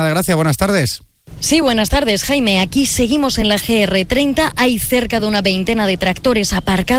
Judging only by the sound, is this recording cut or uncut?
uncut